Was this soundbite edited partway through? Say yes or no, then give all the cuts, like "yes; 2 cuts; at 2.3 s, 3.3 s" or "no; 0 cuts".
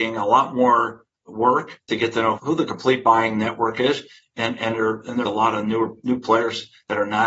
yes; 1 cut; at 5.3 s